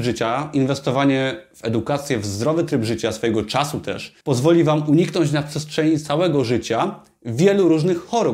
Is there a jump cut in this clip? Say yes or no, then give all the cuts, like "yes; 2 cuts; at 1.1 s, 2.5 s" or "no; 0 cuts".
yes; 1 cut; at 4.2 s